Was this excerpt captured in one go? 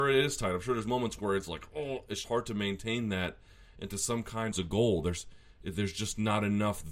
no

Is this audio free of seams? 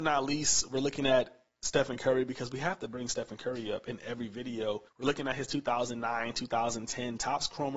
no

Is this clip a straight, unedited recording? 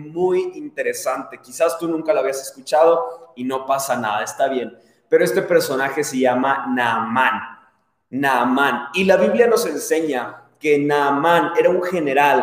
yes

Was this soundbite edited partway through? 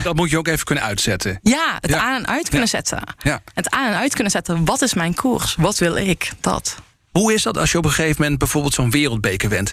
no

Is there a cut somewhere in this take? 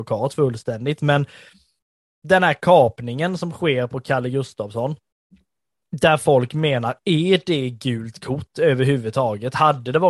no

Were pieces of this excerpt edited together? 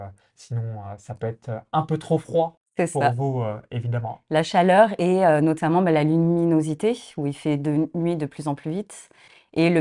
no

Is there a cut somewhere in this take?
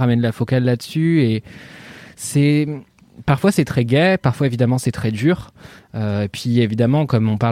no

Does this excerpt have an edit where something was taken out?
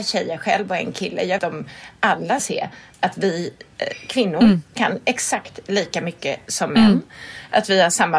yes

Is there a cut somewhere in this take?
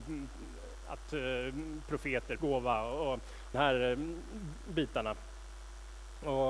yes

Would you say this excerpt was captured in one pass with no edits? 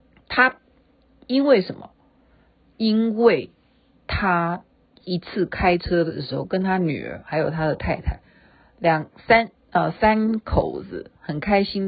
yes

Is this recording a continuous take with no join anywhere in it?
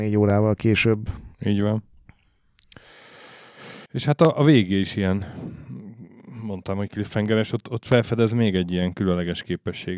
no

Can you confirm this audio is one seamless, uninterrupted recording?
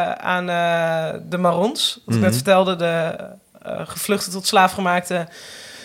yes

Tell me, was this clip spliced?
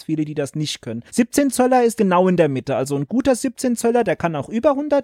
yes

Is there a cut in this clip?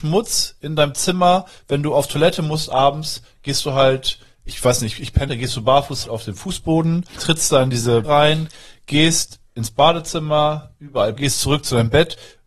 yes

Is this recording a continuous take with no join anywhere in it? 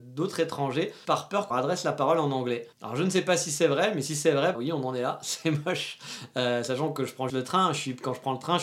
no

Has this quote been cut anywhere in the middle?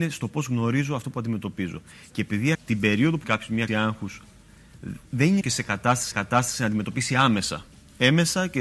yes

